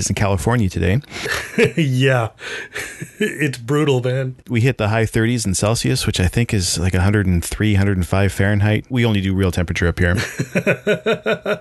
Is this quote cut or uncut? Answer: uncut